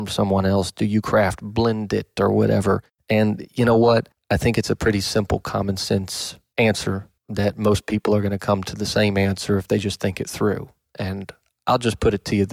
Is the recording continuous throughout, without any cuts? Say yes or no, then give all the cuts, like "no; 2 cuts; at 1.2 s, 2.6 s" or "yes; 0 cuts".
yes; 0 cuts